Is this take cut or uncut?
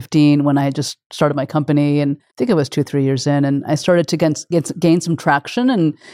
cut